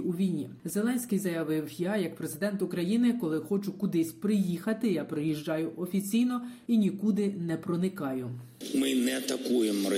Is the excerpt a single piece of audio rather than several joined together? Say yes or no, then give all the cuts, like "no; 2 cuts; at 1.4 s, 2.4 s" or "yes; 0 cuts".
yes; 0 cuts